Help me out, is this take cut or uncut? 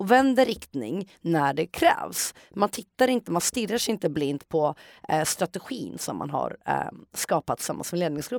uncut